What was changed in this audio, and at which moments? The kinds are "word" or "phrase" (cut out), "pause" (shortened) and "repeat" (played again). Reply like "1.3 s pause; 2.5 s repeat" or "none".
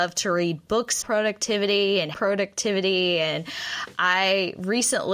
1.0 s word; 2.1 s word